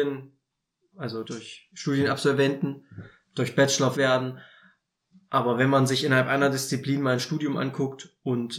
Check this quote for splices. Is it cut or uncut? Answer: cut